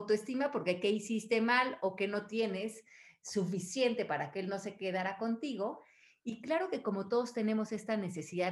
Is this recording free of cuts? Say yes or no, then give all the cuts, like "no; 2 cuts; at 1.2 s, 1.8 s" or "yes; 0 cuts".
yes; 0 cuts